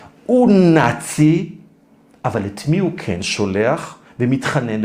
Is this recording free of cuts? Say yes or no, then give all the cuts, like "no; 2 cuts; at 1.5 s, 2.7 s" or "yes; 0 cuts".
yes; 0 cuts